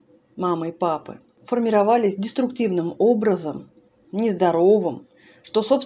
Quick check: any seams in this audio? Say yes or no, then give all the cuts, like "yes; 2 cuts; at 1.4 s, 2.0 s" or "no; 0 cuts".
yes; 1 cut; at 4.0 s